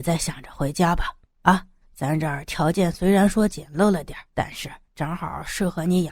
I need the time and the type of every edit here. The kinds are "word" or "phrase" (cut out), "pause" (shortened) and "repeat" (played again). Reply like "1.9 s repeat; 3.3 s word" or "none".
1.8 s pause; 4.3 s pause; 4.8 s pause